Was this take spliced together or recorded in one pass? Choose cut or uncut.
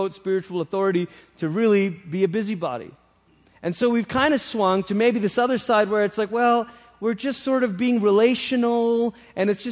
uncut